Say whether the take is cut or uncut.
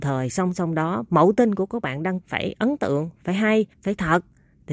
cut